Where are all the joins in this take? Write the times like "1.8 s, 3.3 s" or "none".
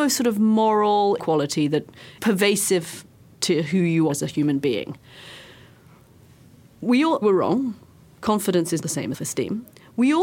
1.2 s, 2.2 s, 4.1 s, 7.2 s, 8.8 s, 9.1 s